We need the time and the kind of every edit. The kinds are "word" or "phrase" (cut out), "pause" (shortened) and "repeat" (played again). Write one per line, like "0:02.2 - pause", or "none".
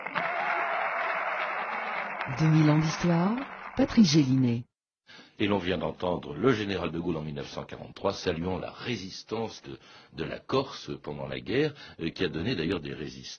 none